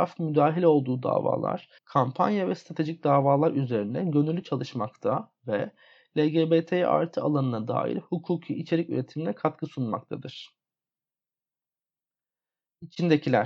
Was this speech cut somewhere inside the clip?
yes; 1 cut; at 1.8 s

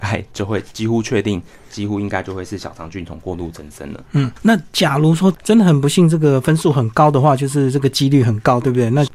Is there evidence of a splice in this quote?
no; 0 cuts

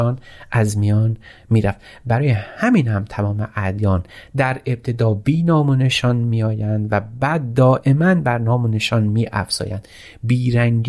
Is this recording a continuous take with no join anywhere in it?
yes; 0 cuts

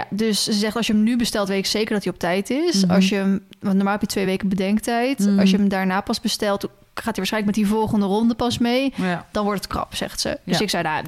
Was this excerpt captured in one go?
yes; 0 cuts

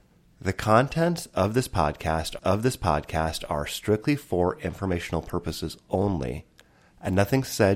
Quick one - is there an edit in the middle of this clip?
yes; 1 cut; at 2.4 s

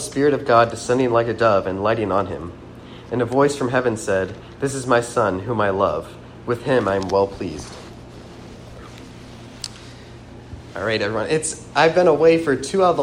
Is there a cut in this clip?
no; 0 cuts

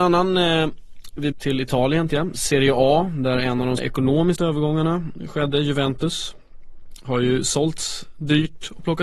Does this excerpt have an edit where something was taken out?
yes; 4 cuts; at 1.3 s, 2.1 s, 3.8 s, 4.4 s

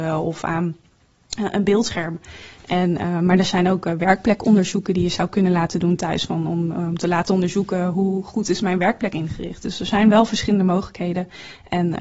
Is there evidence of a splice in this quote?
no; 0 cuts

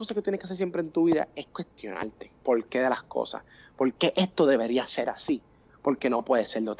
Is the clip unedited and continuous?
no; 1 cut; at 2.4 s

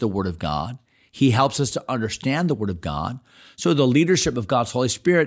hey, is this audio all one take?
yes; 0 cuts

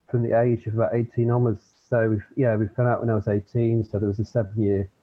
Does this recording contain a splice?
no; 0 cuts

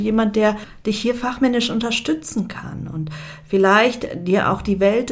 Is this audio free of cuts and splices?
yes; 0 cuts

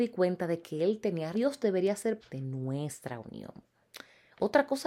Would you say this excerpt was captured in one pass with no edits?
no; 2 cuts; at 1.3 s, 2.2 s

